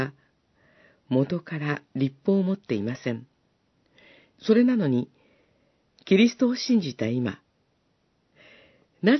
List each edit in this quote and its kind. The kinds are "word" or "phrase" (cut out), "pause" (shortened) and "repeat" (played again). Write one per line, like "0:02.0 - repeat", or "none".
none